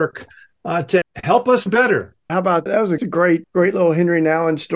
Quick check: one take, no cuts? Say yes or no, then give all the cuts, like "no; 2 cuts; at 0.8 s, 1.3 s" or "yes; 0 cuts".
no; 6 cuts; at 1.0 s, 1.7 s, 2.3 s, 2.7 s, 3.0 s, 3.4 s